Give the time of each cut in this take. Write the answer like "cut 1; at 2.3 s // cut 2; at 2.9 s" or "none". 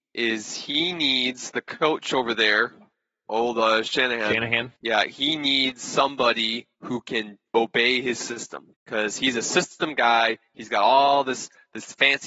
cut 1; at 4.8 s // cut 2; at 6.7 s // cut 3; at 7.5 s // cut 4; at 8.7 s